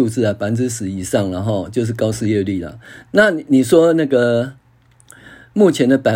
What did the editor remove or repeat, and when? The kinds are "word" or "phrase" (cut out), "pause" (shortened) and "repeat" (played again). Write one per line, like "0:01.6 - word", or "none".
none